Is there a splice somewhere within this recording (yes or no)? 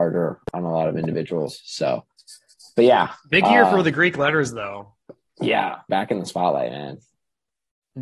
yes